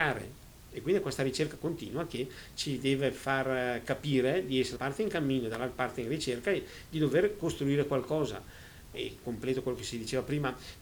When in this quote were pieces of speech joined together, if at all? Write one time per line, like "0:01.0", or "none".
0:04.8
0:08.9